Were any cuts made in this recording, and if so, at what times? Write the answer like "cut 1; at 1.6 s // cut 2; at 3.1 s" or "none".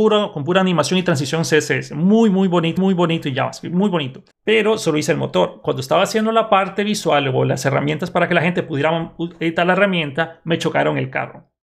cut 1; at 2.8 s // cut 2; at 4.3 s